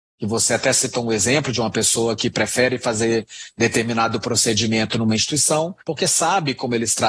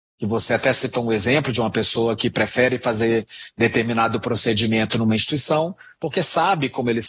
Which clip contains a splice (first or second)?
first